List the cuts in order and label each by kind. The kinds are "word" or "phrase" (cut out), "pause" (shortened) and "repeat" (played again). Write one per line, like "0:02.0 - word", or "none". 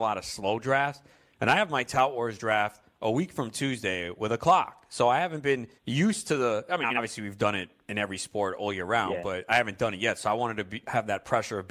0:05.8 - pause